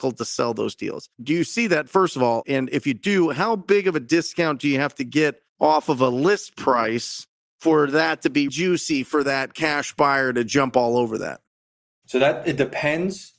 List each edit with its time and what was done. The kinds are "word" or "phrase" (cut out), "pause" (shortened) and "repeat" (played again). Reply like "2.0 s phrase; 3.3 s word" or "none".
1.1 s pause; 5.5 s pause; 8.5 s word